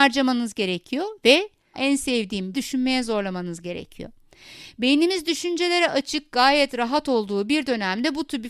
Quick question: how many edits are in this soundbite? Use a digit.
2